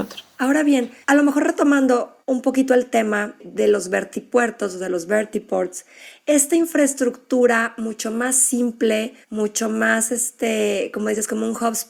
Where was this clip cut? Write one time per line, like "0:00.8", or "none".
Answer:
0:01.0
0:02.2
0:09.2